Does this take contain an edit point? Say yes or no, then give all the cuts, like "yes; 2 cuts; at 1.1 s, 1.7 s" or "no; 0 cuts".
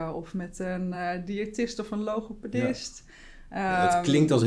no; 0 cuts